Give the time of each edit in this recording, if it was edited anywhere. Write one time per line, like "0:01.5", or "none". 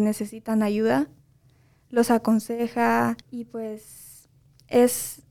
0:03.2